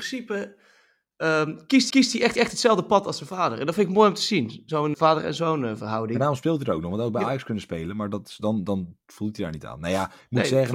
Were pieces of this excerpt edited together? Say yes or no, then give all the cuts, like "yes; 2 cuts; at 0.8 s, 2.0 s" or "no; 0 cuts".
yes; 3 cuts; at 1.9 s, 2.4 s, 4.9 s